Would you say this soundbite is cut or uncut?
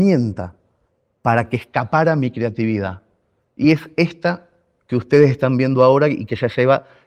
uncut